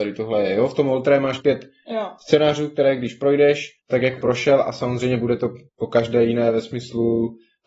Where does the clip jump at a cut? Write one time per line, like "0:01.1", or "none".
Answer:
0:01.4
0:03.8
0:04.2
0:05.7